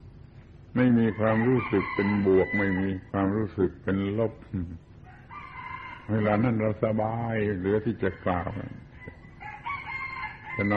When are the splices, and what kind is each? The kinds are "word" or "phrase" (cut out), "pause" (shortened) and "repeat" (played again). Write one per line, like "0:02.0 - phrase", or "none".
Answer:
0:03.1 - pause